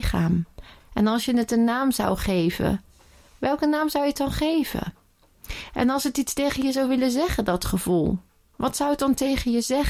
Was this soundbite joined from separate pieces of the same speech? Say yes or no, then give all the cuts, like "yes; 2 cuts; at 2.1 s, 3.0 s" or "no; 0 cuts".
no; 0 cuts